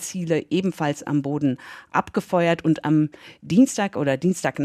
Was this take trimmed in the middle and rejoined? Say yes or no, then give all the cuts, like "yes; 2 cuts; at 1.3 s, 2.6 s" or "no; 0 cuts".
no; 0 cuts